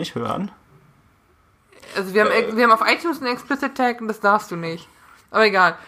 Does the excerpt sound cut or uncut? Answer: uncut